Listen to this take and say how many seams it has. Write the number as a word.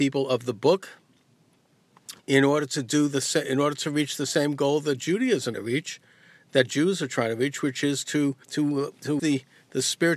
four